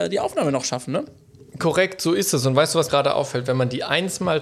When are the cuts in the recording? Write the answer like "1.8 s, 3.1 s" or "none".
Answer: 1.5 s, 2.9 s